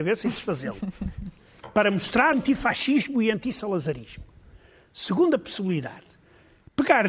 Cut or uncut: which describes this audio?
cut